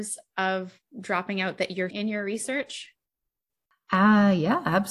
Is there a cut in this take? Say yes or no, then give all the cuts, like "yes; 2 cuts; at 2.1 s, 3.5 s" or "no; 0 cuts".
yes; 1 cut; at 1.9 s